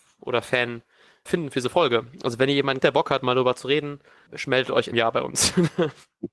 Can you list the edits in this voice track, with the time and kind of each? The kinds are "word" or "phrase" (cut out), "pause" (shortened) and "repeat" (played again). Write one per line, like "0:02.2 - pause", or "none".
0:01.3 - word
0:02.8 - word
0:04.3 - word
0:04.9 - word